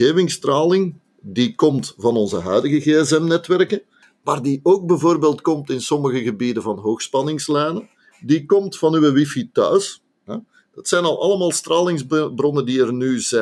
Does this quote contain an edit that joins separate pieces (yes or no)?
no